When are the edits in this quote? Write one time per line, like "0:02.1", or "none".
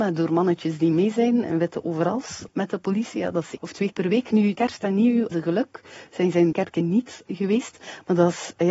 0:01.4
0:02.5
0:03.6
0:03.9
0:04.5
0:05.3
0:06.5
0:07.3